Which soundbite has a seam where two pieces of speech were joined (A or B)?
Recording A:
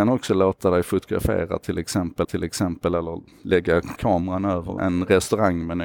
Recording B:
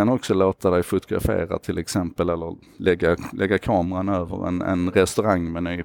A